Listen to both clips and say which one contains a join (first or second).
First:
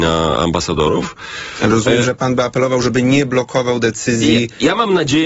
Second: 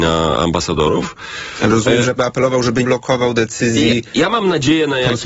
second